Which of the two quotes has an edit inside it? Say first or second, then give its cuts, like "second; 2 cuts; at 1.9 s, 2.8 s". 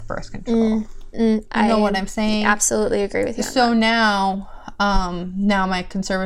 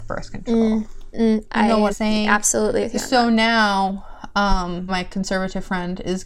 second; 3 cuts; at 1.9 s, 2.8 s, 4.9 s